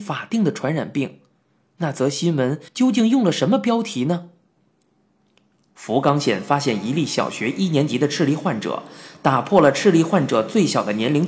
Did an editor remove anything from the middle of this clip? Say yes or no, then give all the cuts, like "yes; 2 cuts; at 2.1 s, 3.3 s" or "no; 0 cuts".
yes; 1 cut; at 2.7 s